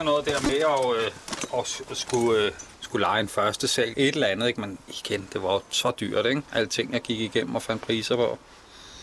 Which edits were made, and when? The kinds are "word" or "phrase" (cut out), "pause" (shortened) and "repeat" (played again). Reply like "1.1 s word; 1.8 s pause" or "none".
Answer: 2.7 s pause; 3.9 s phrase; 5.7 s pause; 6.7 s word